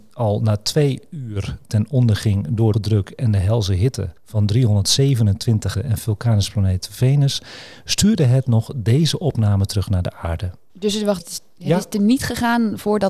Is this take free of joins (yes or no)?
no